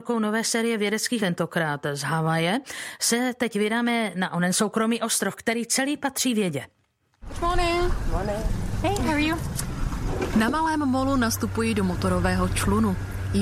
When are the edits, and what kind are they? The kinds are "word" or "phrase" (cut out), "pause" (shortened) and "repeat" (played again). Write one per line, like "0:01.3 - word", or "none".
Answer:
0:01.2 - word

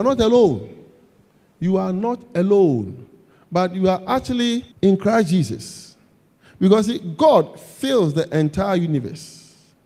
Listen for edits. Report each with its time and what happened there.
0:04.7 - pause

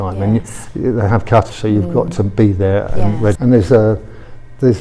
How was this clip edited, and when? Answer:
0:01.5 - word
0:03.4 - phrase

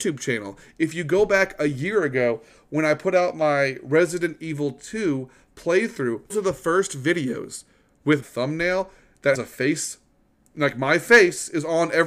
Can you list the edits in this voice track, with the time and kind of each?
0:06.3 - word
0:08.2 - word
0:09.3 - word

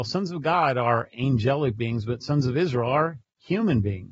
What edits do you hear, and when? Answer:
none

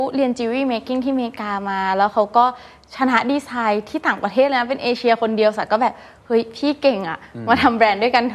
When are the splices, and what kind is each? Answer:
none

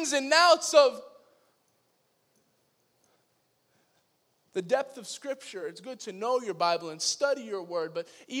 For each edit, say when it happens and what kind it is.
none

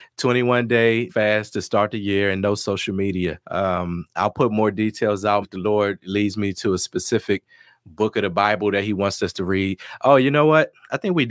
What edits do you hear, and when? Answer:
0:01.1 - word
0:03.4 - pause
0:05.4 - word

